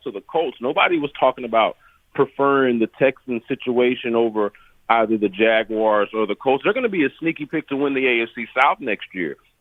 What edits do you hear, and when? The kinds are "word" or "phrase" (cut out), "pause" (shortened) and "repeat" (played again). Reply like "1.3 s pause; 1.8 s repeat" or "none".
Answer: none